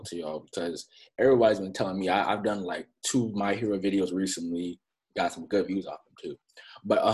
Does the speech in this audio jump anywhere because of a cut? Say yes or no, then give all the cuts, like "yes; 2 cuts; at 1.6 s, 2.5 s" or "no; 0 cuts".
no; 0 cuts